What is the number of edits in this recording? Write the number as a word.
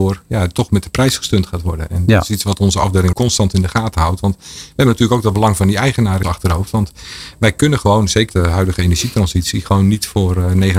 three